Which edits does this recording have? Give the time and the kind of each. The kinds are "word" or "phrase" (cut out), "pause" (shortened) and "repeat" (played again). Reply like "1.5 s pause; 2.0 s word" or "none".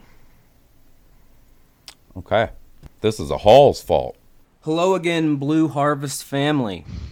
2.9 s pause; 4.4 s pause